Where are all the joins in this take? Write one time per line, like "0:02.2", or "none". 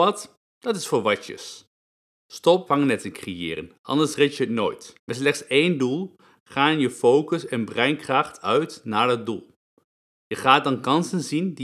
0:02.7
0:05.0

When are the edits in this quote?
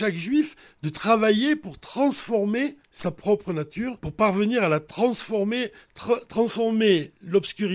0:02.8
0:04.0

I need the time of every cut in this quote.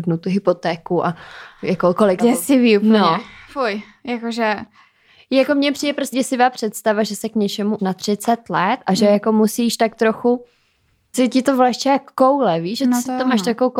0:02.2
0:06.1
0:07.8
0:11.1

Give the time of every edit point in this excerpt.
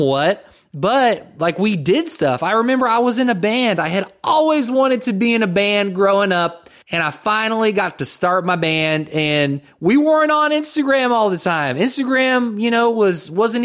0:06.8

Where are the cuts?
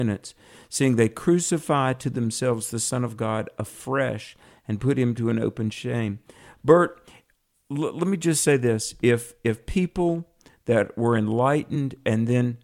none

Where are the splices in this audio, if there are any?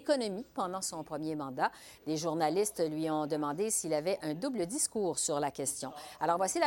none

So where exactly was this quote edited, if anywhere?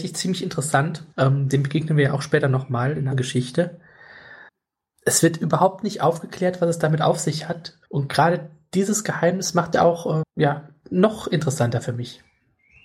0:01.1
0:03.1
0:04.5
0:07.9
0:09.7
0:10.2

